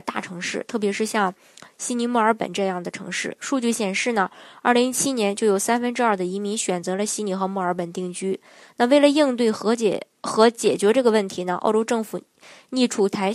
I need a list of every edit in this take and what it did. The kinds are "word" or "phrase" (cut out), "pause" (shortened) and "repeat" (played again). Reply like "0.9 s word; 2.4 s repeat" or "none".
none